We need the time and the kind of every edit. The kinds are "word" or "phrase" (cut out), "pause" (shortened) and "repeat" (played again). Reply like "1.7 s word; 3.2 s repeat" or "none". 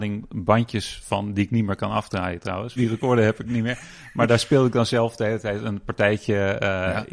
2.8 s phrase; 4.3 s word